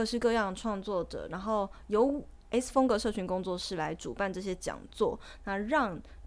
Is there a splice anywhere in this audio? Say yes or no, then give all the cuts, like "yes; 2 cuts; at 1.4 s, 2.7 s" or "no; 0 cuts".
no; 0 cuts